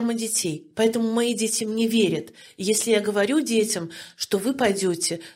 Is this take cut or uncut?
uncut